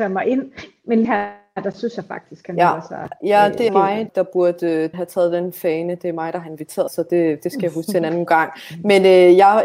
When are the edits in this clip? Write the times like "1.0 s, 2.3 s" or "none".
1.0 s, 3.7 s, 4.1 s, 4.9 s, 6.9 s, 8.3 s